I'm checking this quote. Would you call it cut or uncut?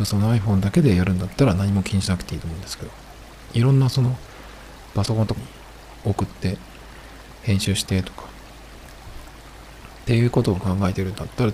cut